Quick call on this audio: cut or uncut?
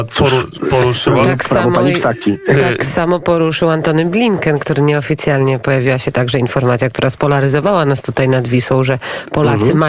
uncut